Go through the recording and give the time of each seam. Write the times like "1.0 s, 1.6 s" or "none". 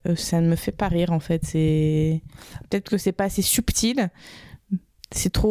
none